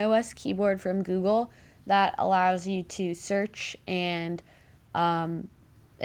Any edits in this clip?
no; 0 cuts

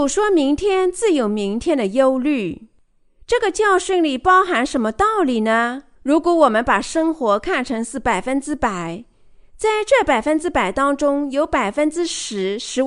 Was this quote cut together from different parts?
yes; 1 cut; at 5.9 s

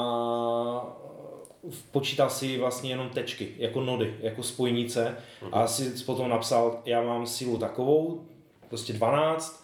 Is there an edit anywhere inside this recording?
no; 0 cuts

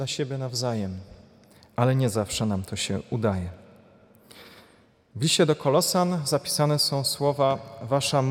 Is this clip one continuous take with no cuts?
yes; 0 cuts

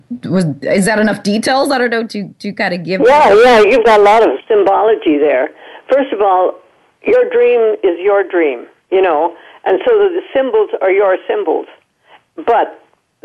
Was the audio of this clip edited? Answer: no; 0 cuts

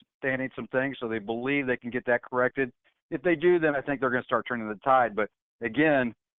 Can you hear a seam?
no; 0 cuts

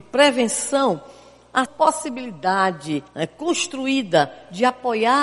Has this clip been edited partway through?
yes; 2 cuts; at 1.7 s, 3.1 s

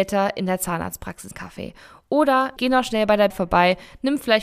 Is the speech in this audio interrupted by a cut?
yes; 3 cuts; at 1.3 s, 2.6 s, 3.3 s

